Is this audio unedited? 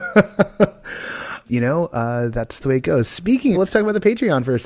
no; 3 cuts; at 1.4 s, 2.6 s, 3.5 s

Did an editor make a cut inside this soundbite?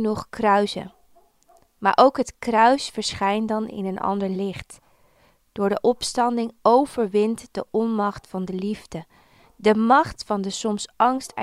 no; 0 cuts

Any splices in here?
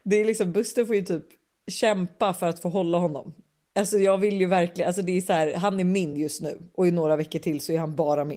no; 0 cuts

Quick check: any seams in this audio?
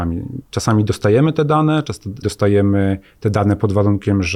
yes; 1 cut; at 2.2 s

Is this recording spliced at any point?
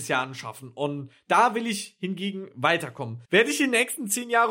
yes; 1 cut; at 3.2 s

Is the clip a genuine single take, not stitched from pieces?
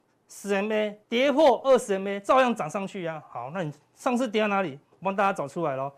no; 2 cuts; at 1.0 s, 4.8 s

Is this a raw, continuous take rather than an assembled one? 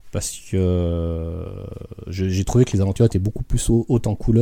yes; 0 cuts

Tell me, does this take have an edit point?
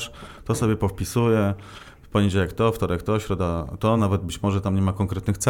no; 0 cuts

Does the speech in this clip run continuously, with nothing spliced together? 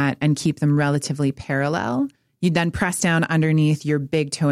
no; 1 cut; at 2.2 s

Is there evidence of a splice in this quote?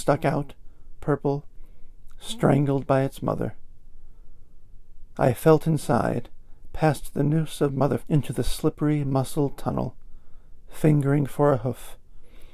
yes; 2 cuts; at 1.0 s, 8.0 s

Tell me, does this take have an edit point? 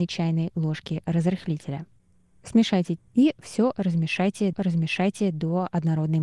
yes; 2 cuts; at 3.0 s, 4.5 s

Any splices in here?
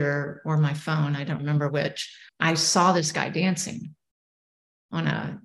yes; 2 cuts; at 1.4 s, 2.3 s

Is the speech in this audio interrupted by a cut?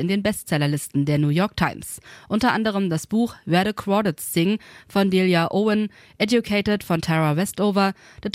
no; 0 cuts

